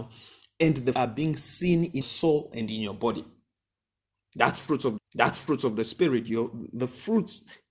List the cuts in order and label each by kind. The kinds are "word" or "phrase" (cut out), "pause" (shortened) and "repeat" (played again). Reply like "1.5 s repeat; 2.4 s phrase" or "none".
0.9 s word; 2.0 s word; 5.0 s repeat